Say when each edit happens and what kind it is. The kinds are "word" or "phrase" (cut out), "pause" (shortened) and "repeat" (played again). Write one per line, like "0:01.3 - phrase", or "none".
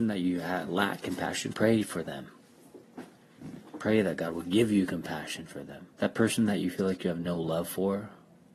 0:01.5 - word
0:05.9 - pause